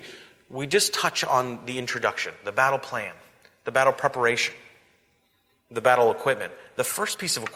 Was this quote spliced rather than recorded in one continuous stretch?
no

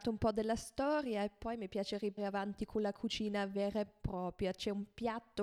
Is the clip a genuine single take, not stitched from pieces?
no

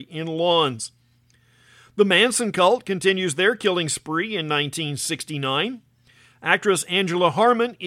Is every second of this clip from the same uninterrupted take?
yes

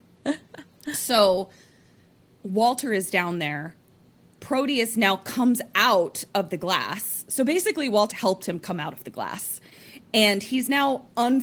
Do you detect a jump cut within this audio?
yes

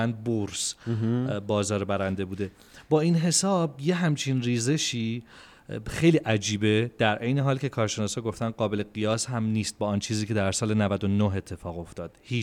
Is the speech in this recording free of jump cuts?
yes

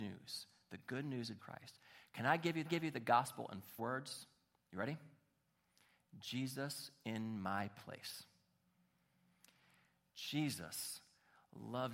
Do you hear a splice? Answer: yes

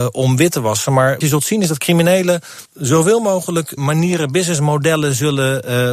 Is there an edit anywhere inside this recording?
yes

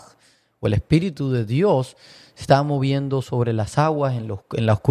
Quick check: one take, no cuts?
yes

